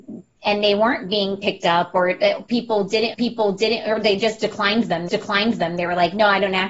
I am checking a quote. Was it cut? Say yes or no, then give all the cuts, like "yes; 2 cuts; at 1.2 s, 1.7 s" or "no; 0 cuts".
yes; 2 cuts; at 3.1 s, 5.1 s